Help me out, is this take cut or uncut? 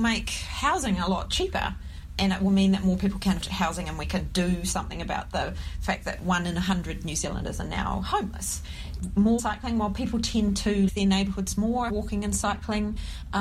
cut